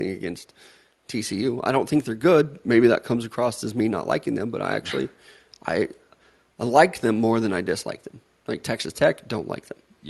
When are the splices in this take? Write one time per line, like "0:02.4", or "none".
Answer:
none